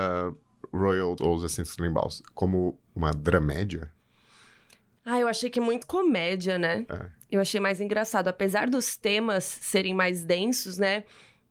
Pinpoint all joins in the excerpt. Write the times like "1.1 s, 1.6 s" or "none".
1.2 s, 5.8 s